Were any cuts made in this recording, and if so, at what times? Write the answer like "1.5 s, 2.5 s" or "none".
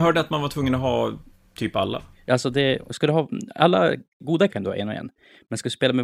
4.5 s